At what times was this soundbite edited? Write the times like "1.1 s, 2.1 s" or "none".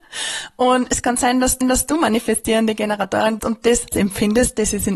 1.6 s, 3.4 s, 3.9 s